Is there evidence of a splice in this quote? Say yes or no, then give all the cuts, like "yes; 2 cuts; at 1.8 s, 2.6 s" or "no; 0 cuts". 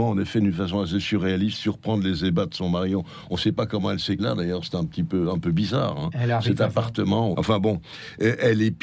yes; 2 cuts; at 4.2 s, 7.3 s